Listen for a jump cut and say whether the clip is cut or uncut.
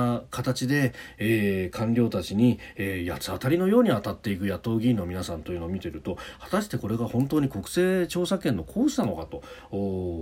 uncut